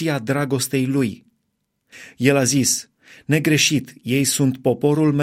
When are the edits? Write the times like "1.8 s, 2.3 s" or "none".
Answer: none